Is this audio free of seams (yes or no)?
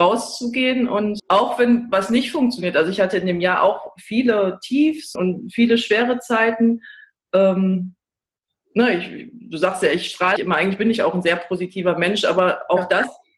no